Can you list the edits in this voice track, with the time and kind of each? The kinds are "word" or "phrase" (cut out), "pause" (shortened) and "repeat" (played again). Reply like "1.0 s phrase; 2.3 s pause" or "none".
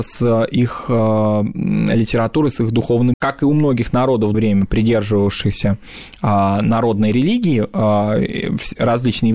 3.1 s word; 4.3 s word